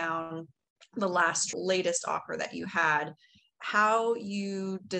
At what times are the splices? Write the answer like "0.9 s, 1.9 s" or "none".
1.5 s